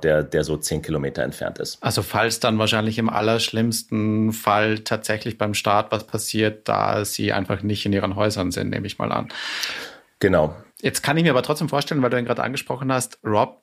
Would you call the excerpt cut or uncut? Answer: cut